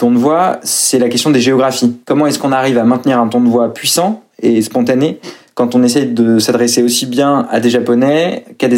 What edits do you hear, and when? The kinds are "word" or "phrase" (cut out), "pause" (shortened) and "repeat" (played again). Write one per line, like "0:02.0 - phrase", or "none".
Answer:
0:02.0 - pause